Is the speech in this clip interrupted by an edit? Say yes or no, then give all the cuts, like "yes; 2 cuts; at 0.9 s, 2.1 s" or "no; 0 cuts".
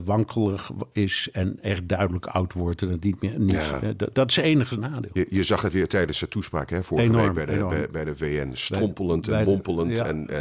no; 0 cuts